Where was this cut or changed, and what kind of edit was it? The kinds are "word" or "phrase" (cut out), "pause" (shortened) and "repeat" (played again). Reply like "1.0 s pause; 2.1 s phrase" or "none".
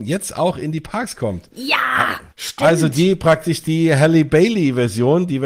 2.3 s pause